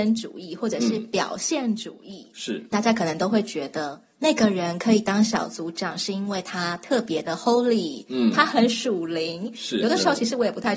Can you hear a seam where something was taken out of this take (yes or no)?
no